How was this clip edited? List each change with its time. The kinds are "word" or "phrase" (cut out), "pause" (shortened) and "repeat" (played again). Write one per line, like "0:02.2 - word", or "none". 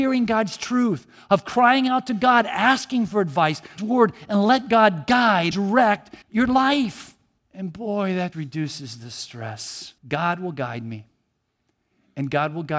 0:03.8 - phrase
0:05.5 - word
0:06.2 - pause
0:07.4 - pause
0:08.3 - word
0:10.0 - pause